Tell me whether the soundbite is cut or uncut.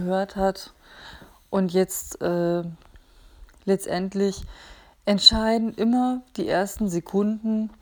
uncut